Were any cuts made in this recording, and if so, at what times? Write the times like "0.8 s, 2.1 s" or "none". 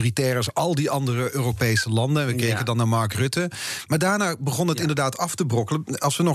none